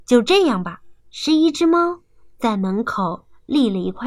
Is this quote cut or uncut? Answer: cut